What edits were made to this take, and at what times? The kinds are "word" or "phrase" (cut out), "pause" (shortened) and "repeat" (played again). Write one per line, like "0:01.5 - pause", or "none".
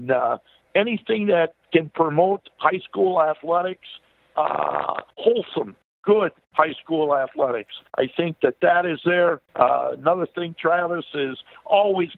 0:05.1 - pause
0:07.9 - pause
0:09.5 - pause